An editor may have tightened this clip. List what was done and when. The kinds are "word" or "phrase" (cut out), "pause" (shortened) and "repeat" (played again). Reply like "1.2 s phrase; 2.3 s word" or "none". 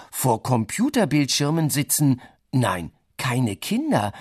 none